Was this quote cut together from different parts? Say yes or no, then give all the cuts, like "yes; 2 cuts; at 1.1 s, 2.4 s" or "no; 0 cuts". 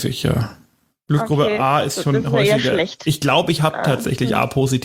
no; 0 cuts